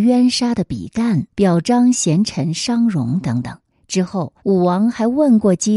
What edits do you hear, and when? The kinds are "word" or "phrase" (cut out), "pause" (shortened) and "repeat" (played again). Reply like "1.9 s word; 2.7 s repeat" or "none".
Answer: 1.3 s pause; 3.7 s pause; 4.4 s pause